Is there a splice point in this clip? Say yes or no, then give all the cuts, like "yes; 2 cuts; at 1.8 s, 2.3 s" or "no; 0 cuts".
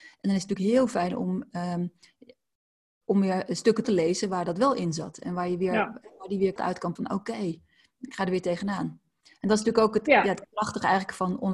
yes; 3 cuts; at 3.8 s, 6.6 s, 7.0 s